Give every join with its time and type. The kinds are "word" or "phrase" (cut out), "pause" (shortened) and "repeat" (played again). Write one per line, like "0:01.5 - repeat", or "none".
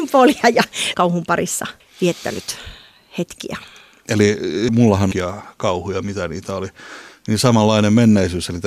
0:00.9 - phrase
0:01.8 - pause
0:04.7 - word
0:05.1 - phrase